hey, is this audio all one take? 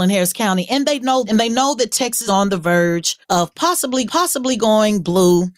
no; 4 cuts; at 1.3 s, 2.3 s, 3.2 s, 4.1 s

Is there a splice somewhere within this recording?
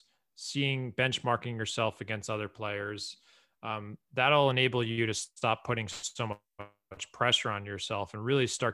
no; 0 cuts

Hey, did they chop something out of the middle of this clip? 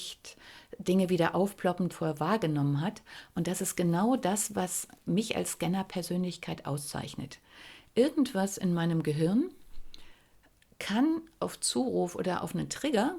yes; 1 cut; at 1.9 s

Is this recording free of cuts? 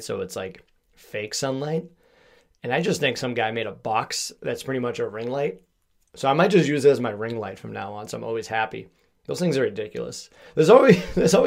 yes; 0 cuts

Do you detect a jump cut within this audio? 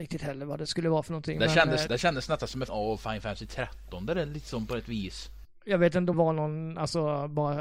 yes; 3 cuts; at 1.9 s, 2.7 s, 6.1 s

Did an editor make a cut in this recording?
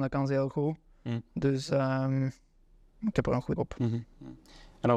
yes; 2 cuts; at 3.1 s, 3.6 s

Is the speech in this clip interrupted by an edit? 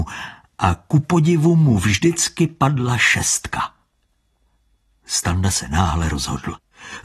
no; 0 cuts

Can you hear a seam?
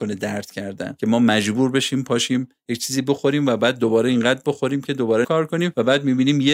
yes; 1 cut; at 5.2 s

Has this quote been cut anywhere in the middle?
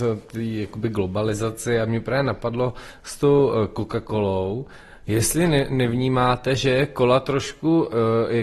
no; 0 cuts

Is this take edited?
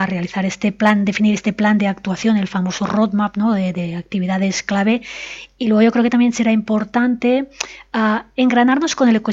no; 0 cuts

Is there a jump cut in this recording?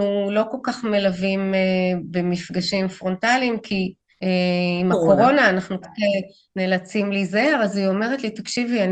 yes; 2 cuts; at 4.1 s, 5.8 s

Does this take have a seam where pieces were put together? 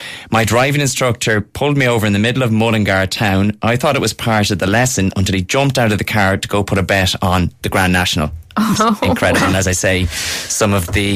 yes; 1 cut; at 8.7 s

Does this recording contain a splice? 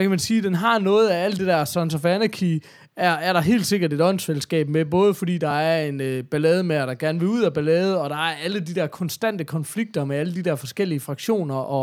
no; 0 cuts

